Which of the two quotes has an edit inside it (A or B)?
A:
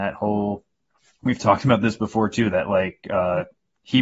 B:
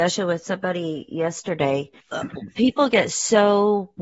B